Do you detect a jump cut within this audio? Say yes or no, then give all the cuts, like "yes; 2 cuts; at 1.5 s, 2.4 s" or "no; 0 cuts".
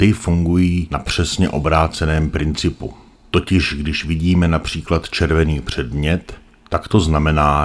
no; 0 cuts